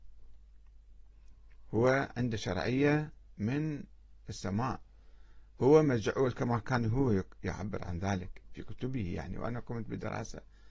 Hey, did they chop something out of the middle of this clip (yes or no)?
no